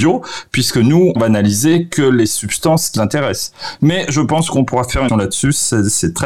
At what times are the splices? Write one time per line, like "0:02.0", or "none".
0:01.2
0:03.0
0:05.1